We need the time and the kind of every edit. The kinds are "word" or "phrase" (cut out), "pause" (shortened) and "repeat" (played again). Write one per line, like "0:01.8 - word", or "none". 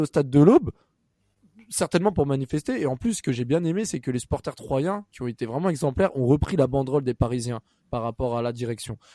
none